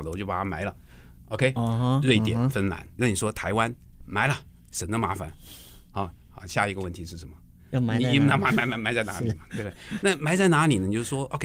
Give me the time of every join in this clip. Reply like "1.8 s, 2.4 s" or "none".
none